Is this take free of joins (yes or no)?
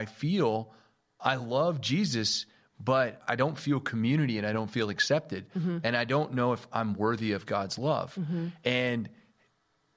yes